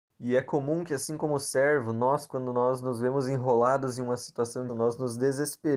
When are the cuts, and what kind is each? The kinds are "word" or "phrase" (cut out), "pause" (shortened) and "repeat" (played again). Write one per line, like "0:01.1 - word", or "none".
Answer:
0:04.7 - word